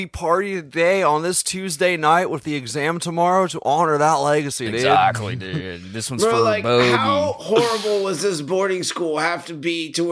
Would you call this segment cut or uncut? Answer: uncut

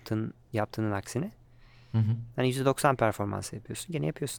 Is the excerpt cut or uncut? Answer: uncut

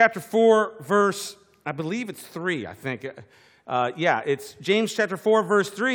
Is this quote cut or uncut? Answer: uncut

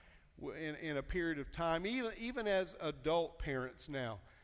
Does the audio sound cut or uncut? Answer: uncut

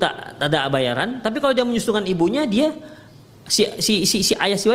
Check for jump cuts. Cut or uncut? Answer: uncut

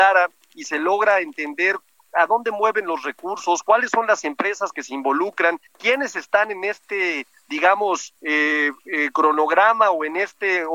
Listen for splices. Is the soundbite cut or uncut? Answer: cut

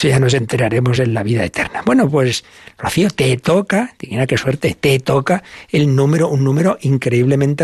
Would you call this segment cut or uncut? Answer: uncut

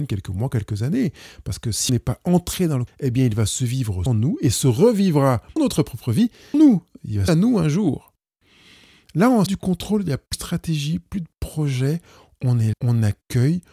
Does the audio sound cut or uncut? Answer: cut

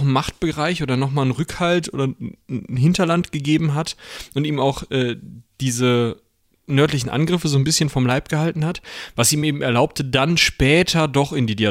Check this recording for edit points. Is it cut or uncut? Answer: uncut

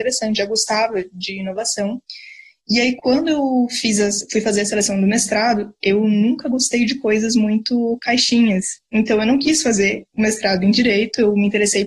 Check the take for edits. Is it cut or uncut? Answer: uncut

